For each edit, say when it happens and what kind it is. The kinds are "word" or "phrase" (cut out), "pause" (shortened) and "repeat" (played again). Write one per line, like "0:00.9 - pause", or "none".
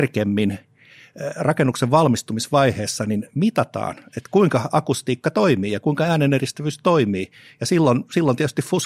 none